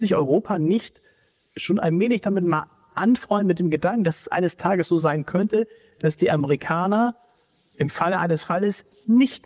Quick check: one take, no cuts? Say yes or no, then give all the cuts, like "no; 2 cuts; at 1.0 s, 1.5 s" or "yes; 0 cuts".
yes; 0 cuts